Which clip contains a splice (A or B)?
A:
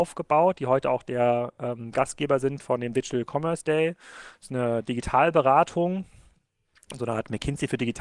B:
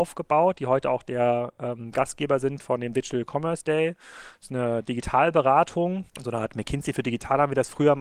B